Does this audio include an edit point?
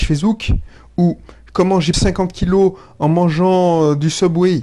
yes; 1 cut; at 1.9 s

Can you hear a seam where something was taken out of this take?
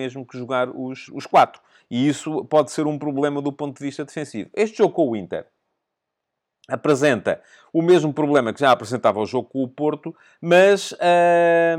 yes; 1 cut; at 1.1 s

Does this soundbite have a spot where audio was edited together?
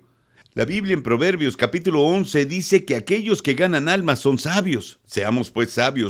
yes; 1 cut; at 5.0 s

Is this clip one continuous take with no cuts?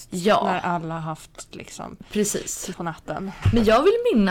no; 2 cuts; at 1.5 s, 2.7 s

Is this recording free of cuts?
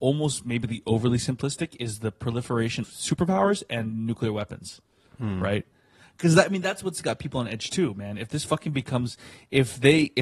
no; 1 cut; at 2.8 s

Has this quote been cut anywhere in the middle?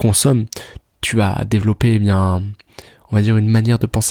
no; 0 cuts

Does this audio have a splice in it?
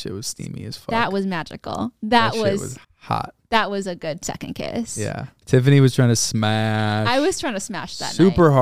yes; 1 cut; at 2.8 s

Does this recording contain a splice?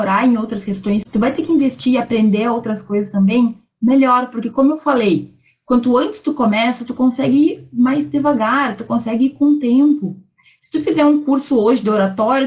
no; 0 cuts

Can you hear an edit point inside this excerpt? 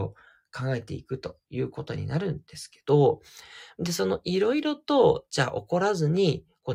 no; 0 cuts

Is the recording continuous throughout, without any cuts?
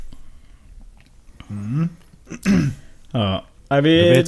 yes; 0 cuts

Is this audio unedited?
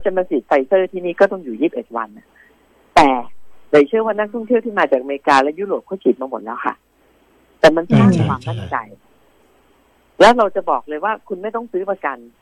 yes; 0 cuts

